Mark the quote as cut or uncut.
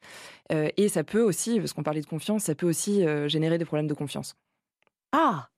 uncut